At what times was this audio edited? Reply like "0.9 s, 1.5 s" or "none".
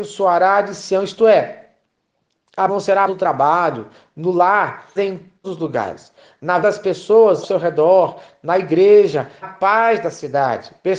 2.7 s, 3.1 s, 5.0 s, 5.4 s, 6.6 s, 7.4 s, 9.4 s